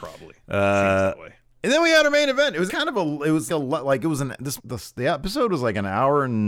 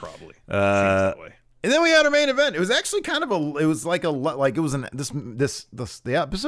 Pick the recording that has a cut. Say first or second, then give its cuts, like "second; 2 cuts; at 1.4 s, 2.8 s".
first; 3 cuts; at 2.7 s, 3.5 s, 4.6 s